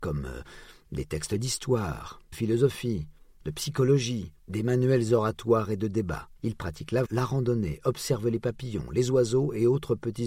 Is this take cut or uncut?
cut